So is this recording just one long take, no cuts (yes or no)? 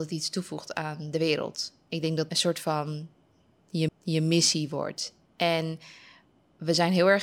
no